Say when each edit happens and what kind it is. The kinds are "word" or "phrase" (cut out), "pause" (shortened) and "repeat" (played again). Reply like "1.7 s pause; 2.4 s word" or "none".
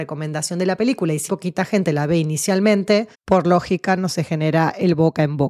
1.3 s word; 3.1 s pause